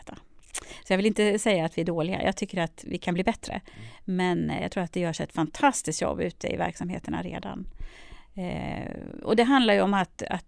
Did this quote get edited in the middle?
no; 0 cuts

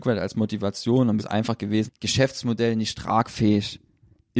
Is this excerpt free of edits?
no; 2 cuts; at 1.2 s, 1.9 s

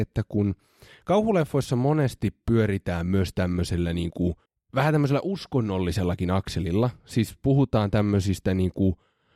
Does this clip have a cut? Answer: yes; 1 cut; at 4.5 s

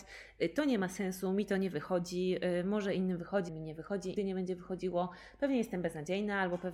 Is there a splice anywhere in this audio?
yes; 2 cuts; at 3.5 s, 4.2 s

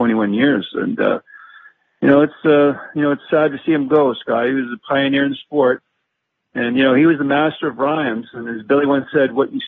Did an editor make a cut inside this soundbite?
no; 0 cuts

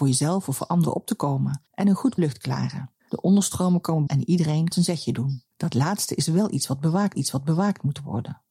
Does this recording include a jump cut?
yes; 7 cuts; at 1.7 s, 2.2 s, 3.0 s, 4.1 s, 4.7 s, 5.5 s, 7.1 s

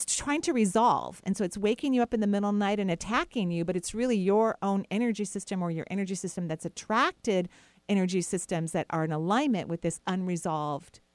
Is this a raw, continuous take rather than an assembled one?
yes; 0 cuts

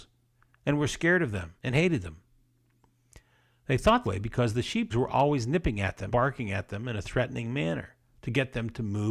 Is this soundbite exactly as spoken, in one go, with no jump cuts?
no; 4 cuts; at 1.6 s, 4.0 s, 4.9 s, 6.1 s

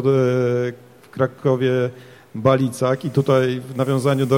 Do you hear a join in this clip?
no; 0 cuts

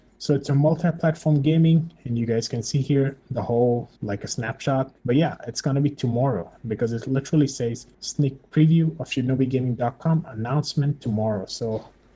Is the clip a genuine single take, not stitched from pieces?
no; 3 cuts; at 4.0 s, 5.0 s, 7.9 s

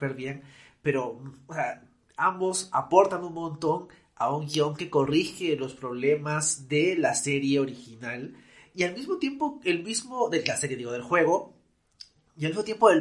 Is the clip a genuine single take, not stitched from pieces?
yes; 0 cuts

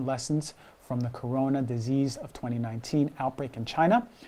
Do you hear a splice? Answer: no; 0 cuts

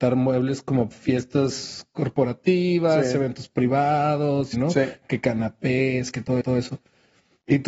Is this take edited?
yes; 3 cuts; at 0.9 s, 4.5 s, 6.4 s

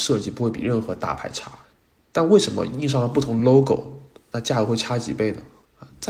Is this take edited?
no; 0 cuts

